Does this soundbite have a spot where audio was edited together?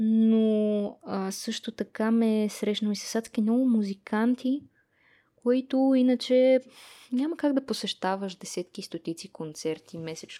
no; 0 cuts

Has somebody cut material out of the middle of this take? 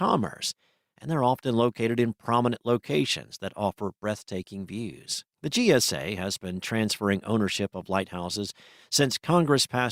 yes; 1 cut; at 5.3 s

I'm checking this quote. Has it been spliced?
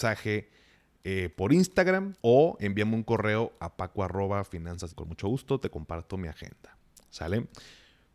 yes; 2 cuts; at 2.2 s, 4.9 s

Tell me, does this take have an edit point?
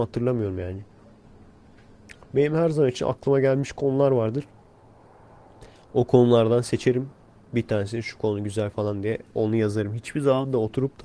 no; 0 cuts

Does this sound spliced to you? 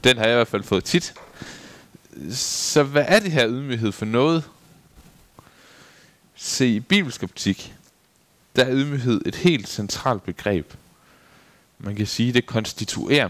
no; 0 cuts

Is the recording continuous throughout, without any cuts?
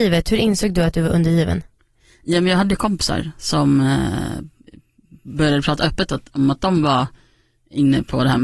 yes; 0 cuts

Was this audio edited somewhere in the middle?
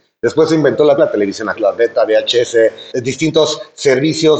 yes; 3 cuts; at 1.0 s, 1.6 s, 2.9 s

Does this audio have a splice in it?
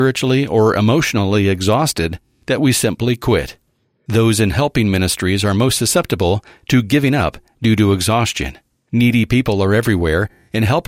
no; 0 cuts

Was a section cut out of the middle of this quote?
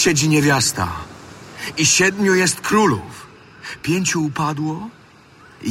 no; 0 cuts

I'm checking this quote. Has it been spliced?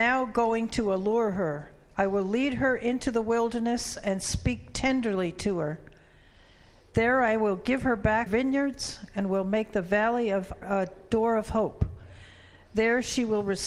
yes; 2 cuts; at 8.3 s, 10.6 s

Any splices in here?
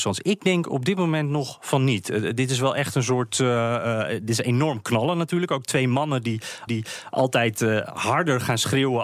yes; 1 cut; at 6.7 s

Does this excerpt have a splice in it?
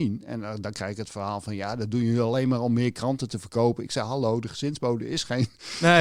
no; 0 cuts

